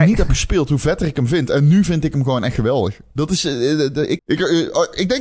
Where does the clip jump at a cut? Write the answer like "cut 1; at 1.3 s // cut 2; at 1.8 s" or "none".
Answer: cut 1; at 4.2 s